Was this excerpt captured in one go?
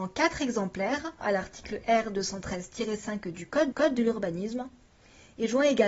no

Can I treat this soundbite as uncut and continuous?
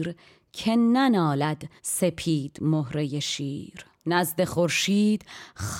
no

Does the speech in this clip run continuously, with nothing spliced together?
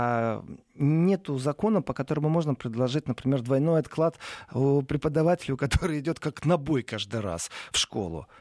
yes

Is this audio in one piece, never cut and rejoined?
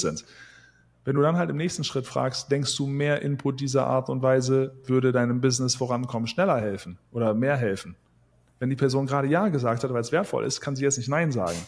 yes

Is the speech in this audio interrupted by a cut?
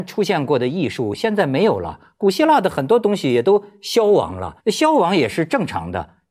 yes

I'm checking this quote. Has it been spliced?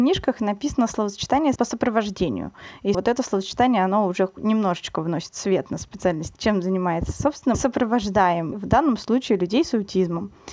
yes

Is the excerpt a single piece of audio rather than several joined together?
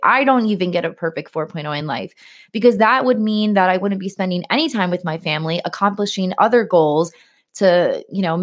yes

